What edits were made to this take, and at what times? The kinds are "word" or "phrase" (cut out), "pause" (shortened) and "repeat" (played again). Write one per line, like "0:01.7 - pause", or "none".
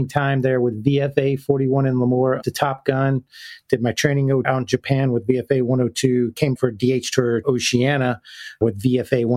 0:02.4 - word
0:04.4 - word
0:06.6 - word
0:07.4 - word